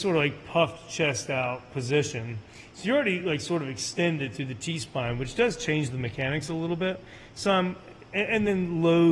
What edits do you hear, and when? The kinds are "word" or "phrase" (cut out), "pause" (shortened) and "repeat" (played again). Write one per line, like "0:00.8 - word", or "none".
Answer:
none